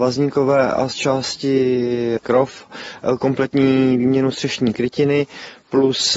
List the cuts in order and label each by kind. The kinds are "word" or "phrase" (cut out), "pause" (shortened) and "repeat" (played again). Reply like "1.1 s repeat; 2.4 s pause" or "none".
none